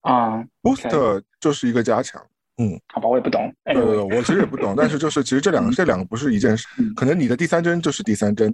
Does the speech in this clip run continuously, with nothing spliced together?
no; 1 cut; at 5.7 s

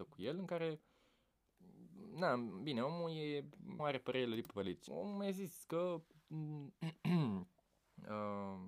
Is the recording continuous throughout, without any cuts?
no; 2 cuts; at 3.8 s, 4.9 s

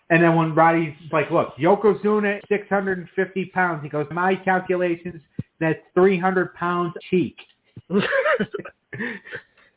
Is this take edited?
yes; 4 cuts; at 1.1 s, 2.4 s, 4.1 s, 7.0 s

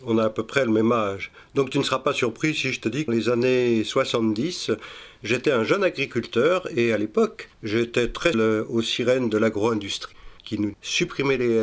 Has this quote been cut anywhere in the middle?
yes; 5 cuts; at 3.1 s, 7.5 s, 8.3 s, 10.4 s, 10.7 s

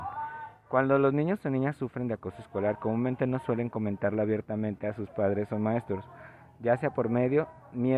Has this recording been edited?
no; 0 cuts

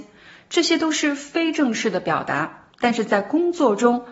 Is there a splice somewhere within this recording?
yes; 1 cut; at 2.7 s

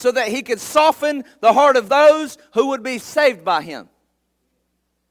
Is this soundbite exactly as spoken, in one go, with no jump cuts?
yes; 0 cuts

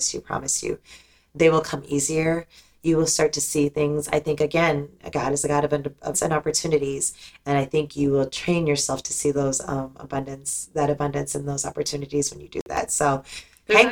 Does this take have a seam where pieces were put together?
yes; 1 cut; at 6.1 s

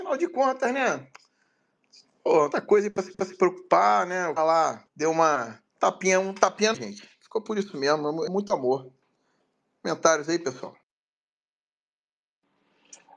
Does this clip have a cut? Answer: yes; 8 cuts; at 2.5 s, 3.1 s, 4.4 s, 4.9 s, 5.7 s, 6.7 s, 7.1 s, 8.3 s

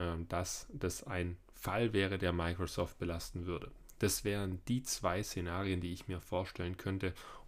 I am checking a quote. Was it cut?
no; 0 cuts

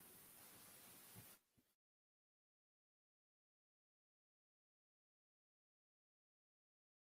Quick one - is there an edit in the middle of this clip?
no; 0 cuts

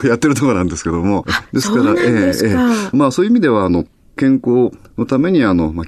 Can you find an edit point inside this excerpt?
yes; 1 cut; at 2.9 s

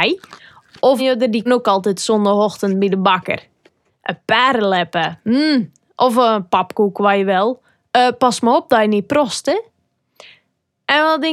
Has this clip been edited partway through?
yes; 2 cuts; at 1.0 s, 1.5 s

